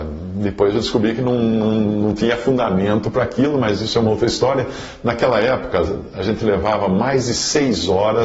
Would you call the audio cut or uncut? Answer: uncut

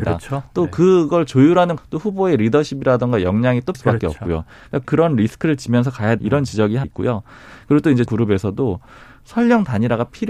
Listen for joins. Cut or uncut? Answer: cut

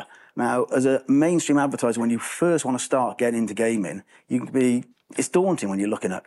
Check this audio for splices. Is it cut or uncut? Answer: uncut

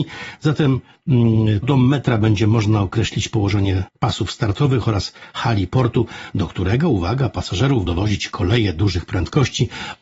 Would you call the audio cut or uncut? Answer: cut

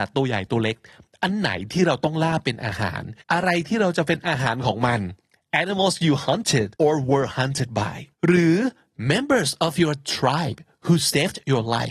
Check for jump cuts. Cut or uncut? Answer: cut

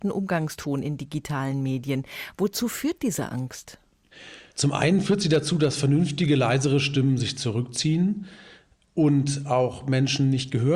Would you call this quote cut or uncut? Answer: uncut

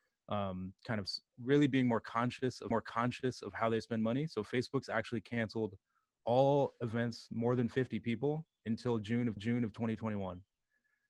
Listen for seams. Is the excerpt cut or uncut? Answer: cut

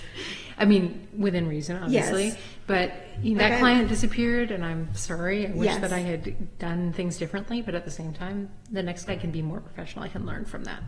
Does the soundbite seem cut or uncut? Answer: cut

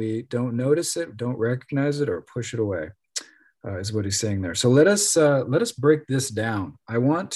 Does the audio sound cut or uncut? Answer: uncut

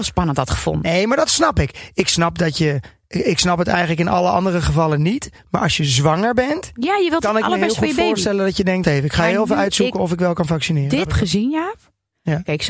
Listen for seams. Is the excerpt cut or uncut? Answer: cut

